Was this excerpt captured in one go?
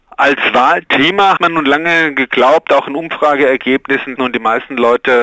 no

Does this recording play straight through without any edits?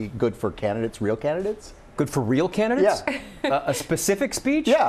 yes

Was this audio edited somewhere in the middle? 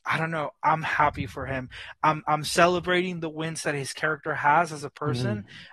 no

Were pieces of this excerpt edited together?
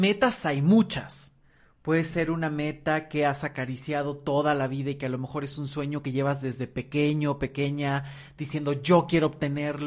no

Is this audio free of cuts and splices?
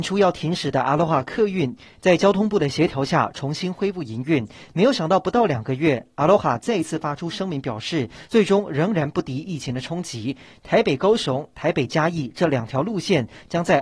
yes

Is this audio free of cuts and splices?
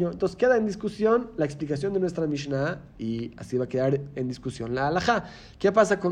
yes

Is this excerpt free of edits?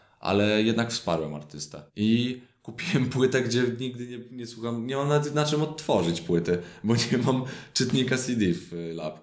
no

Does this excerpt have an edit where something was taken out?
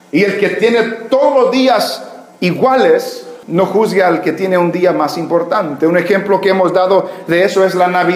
yes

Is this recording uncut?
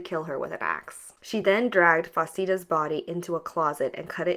yes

